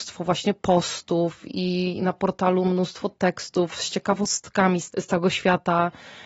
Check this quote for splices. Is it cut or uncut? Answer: uncut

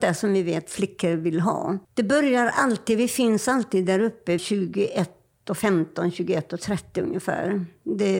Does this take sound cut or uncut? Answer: cut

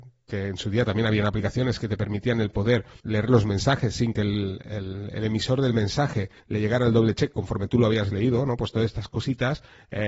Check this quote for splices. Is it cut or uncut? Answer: cut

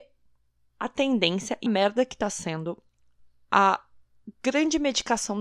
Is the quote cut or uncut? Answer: cut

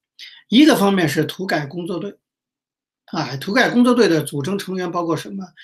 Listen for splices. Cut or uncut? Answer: uncut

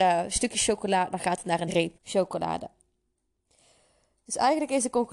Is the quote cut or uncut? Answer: cut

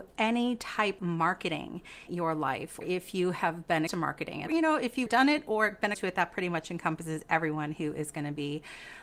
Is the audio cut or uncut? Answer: cut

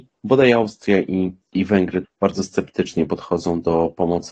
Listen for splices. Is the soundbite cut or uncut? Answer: cut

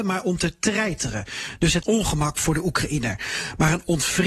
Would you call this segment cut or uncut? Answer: cut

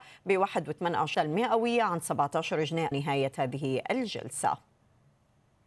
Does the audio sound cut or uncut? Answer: cut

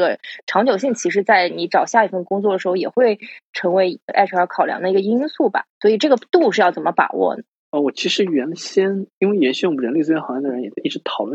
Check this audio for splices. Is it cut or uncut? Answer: cut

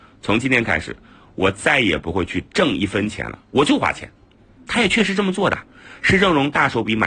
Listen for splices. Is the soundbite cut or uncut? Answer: uncut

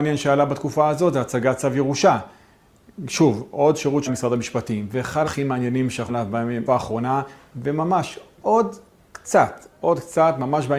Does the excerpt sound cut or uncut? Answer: cut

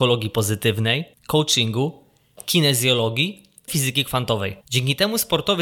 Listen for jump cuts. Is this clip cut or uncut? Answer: cut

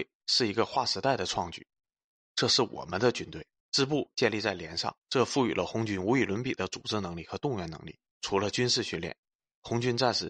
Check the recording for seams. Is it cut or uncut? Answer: cut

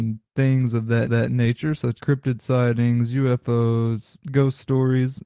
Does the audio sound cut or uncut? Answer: cut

